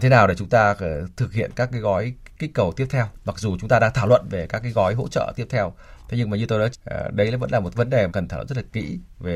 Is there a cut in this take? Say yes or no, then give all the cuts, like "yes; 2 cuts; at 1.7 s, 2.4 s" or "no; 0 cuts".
yes; 3 cuts; at 6.7 s, 7.7 s, 8.1 s